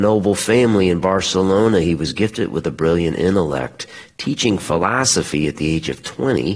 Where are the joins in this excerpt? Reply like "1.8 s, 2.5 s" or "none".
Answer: none